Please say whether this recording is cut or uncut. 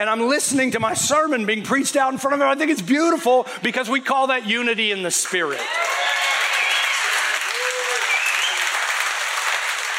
uncut